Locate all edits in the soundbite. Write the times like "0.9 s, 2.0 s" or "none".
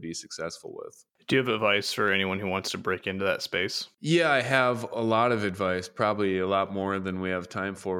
1.1 s